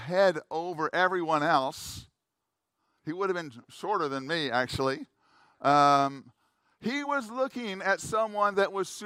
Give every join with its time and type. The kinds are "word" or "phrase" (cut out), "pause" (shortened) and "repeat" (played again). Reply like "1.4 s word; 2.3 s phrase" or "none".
none